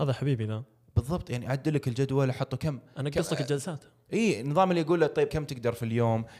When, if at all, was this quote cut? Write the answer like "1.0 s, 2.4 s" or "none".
5.3 s